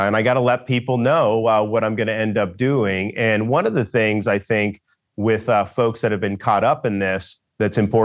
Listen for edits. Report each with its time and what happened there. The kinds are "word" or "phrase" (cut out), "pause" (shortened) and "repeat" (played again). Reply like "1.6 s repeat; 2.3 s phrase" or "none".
none